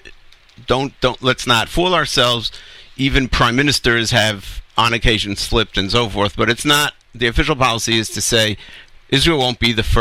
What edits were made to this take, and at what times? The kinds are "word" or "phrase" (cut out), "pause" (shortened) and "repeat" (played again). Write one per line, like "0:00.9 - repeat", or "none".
0:04.7 - pause